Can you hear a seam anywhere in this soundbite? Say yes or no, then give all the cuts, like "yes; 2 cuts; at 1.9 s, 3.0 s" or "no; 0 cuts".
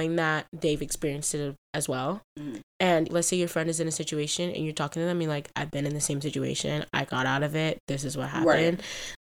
yes; 1 cut; at 3.1 s